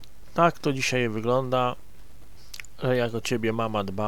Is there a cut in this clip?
no; 0 cuts

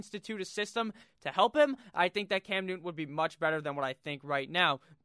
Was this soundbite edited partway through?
no; 0 cuts

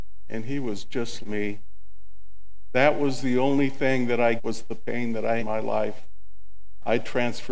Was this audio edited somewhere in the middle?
yes; 3 cuts; at 1.2 s, 4.4 s, 5.4 s

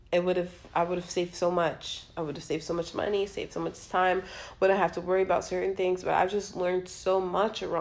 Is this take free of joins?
yes; 0 cuts

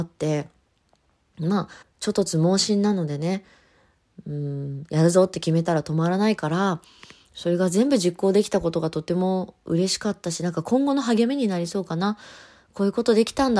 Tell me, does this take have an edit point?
yes; 1 cut; at 1.8 s

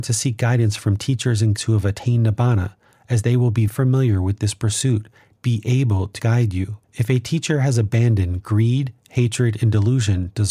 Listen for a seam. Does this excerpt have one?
yes; 5 cuts; at 1.6 s, 3.7 s, 5.3 s, 6.2 s, 6.8 s

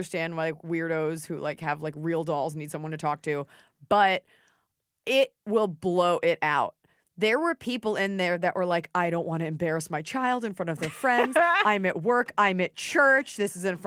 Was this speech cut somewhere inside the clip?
no; 0 cuts

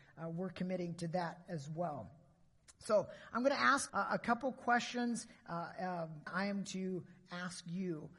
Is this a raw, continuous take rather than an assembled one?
no; 3 cuts; at 3.9 s, 6.3 s, 6.6 s

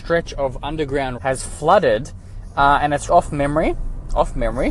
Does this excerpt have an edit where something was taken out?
yes; 2 cuts; at 1.2 s, 3.1 s

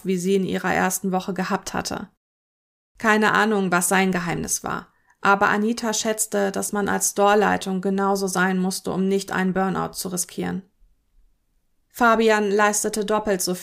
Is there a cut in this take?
no; 0 cuts

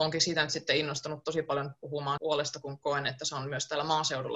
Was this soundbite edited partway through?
yes; 1 cut; at 2.2 s

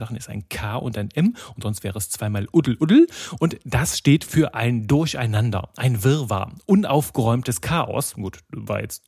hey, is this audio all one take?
yes; 0 cuts

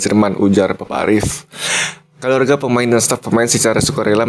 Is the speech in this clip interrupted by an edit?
no; 0 cuts

